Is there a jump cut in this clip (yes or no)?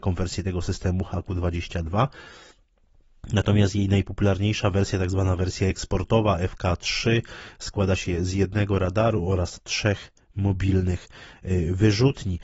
no